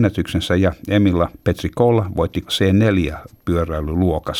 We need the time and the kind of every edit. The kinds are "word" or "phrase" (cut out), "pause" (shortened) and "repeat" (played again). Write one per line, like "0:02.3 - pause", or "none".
0:01.3 - word
0:02.5 - word